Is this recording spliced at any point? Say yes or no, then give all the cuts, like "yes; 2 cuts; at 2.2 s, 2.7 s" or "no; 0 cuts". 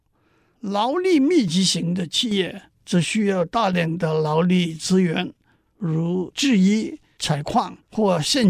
no; 0 cuts